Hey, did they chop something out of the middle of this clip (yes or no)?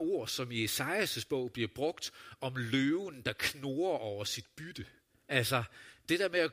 yes